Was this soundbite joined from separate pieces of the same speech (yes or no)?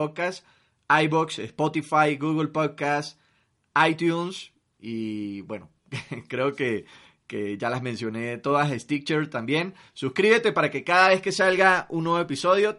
no